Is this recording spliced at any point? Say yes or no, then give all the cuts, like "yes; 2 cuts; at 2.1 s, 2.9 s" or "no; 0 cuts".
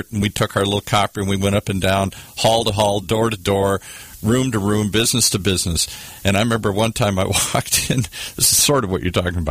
no; 0 cuts